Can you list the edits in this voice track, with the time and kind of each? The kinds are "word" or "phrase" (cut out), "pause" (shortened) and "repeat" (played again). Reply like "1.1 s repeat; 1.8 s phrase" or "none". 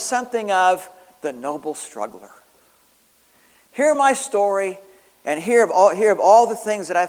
none